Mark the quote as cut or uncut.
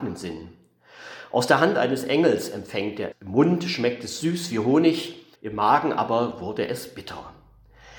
cut